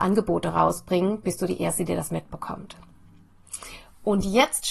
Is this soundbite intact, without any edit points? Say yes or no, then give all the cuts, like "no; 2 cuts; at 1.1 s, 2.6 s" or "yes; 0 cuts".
no; 1 cut; at 1.2 s